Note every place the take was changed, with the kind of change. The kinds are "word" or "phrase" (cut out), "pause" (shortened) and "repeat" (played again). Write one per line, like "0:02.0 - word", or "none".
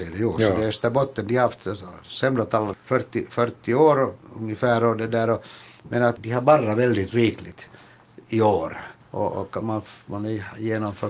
0:02.7 - word
0:06.2 - word
0:09.0 - pause
0:09.6 - phrase